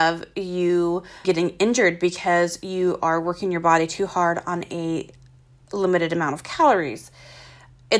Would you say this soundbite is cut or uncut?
cut